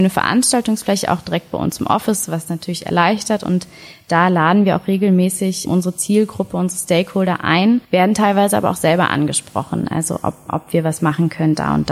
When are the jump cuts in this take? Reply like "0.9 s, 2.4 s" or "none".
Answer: 7.8 s